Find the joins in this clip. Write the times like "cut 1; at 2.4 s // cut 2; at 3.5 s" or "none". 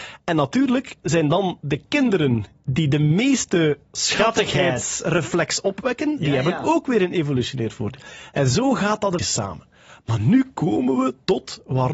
cut 1; at 9.2 s

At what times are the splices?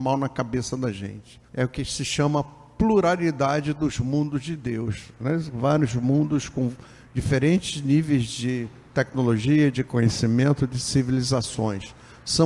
cut 1; at 1.5 s

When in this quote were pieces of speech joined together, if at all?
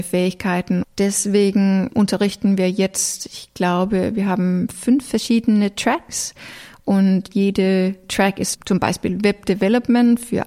cut 1; at 1.9 s // cut 2; at 8.5 s

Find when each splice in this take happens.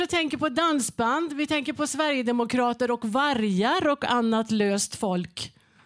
none

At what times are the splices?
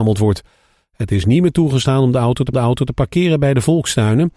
cut 1; at 2.5 s

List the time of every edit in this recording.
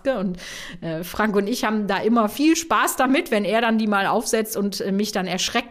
none

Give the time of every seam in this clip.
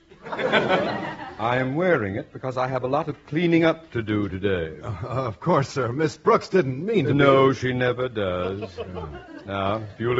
none

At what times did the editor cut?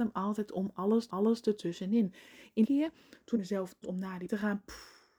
cut 1; at 1.1 s // cut 2; at 2.6 s // cut 3; at 3.3 s // cut 4; at 3.8 s // cut 5; at 4.3 s

